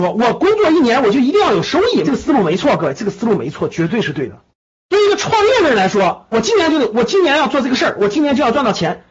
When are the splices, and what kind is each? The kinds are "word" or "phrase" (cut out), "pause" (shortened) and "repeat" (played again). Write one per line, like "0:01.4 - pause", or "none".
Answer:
0:02.0 - phrase
0:04.5 - pause
0:06.3 - phrase